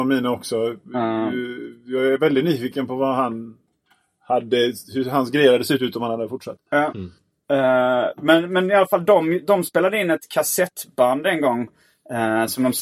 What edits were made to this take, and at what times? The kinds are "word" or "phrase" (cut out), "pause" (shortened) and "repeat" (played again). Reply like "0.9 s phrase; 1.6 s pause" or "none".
none